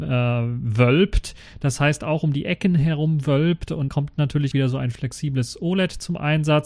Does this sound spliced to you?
yes; 2 cuts; at 3.9 s, 4.5 s

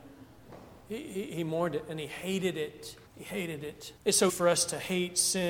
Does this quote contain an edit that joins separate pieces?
yes; 3 cuts; at 3.1 s, 4.0 s, 4.3 s

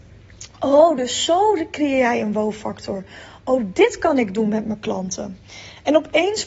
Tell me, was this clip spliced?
no; 0 cuts

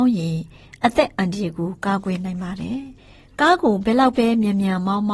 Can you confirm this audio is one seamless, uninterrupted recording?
no; 1 cut; at 3.0 s

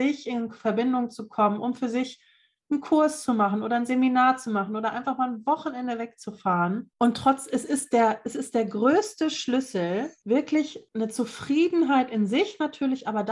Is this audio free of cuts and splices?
yes; 0 cuts

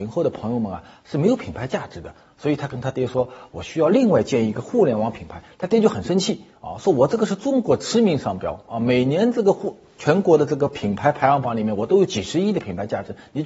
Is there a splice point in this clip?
yes; 1 cut; at 5.5 s

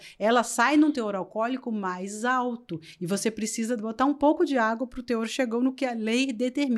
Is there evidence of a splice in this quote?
no; 0 cuts

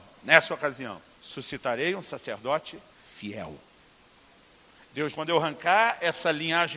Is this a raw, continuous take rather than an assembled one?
no; 3 cuts; at 1.1 s, 2.9 s, 5.1 s

